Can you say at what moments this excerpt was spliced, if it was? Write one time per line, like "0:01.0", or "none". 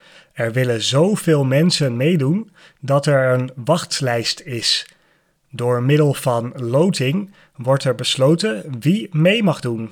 none